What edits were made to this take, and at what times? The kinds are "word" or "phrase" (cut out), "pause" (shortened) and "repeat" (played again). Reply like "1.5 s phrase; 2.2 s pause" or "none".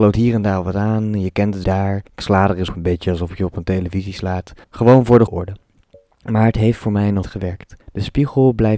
1.6 s phrase; 2.1 s pause; 2.7 s word; 4.6 s pause; 5.3 s word; 7.2 s word; 7.8 s pause